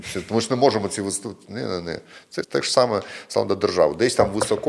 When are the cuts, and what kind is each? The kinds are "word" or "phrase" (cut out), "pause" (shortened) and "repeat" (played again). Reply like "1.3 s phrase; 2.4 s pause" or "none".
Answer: 2.4 s word